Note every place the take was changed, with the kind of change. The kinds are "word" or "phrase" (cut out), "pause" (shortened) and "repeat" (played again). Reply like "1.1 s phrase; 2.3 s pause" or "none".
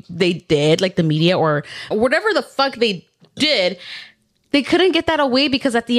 1.9 s word